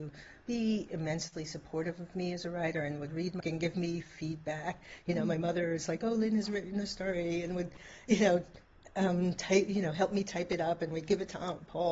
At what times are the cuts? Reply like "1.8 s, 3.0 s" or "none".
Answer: 3.4 s